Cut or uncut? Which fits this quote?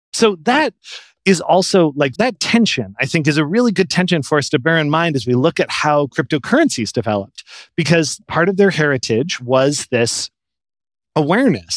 uncut